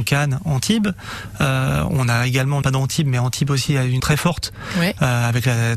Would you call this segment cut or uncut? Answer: cut